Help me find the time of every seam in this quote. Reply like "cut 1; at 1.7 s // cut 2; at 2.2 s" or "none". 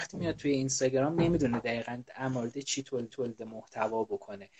cut 1; at 3.1 s